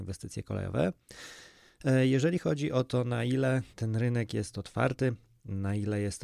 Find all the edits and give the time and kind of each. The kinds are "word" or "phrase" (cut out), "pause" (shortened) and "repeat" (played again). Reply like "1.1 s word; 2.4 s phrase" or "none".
3.7 s pause